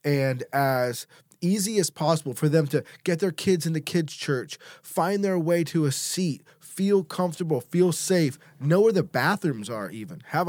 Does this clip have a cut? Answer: no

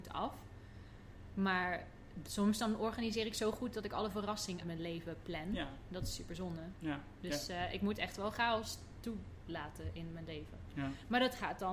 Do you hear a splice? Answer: yes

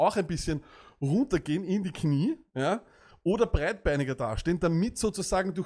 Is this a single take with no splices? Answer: yes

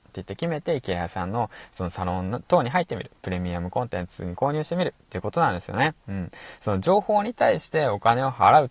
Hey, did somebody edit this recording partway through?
no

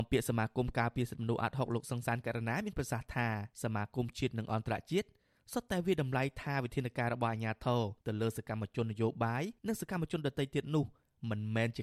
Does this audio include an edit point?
yes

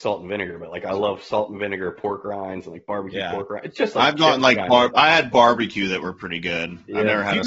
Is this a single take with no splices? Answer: yes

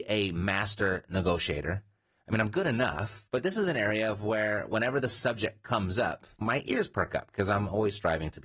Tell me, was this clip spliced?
yes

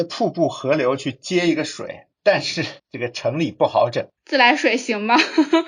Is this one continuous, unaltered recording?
no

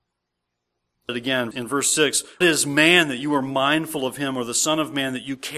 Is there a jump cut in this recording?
yes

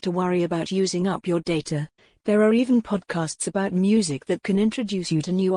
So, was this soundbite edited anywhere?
yes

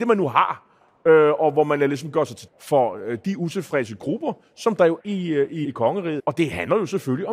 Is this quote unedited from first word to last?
no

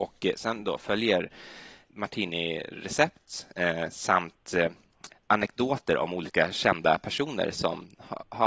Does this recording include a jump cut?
yes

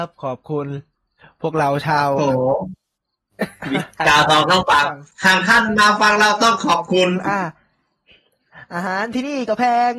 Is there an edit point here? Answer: yes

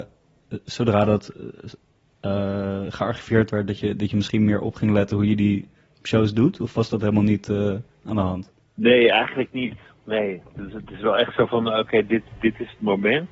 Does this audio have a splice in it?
no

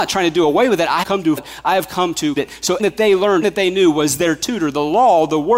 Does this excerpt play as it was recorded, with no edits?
no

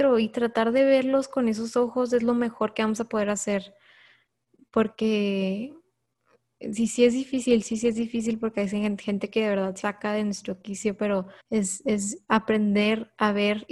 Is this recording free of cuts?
no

